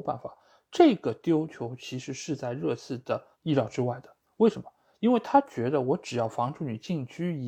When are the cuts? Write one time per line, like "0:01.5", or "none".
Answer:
0:03.3